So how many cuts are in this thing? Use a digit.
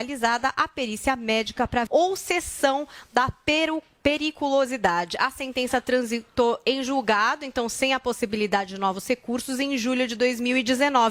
1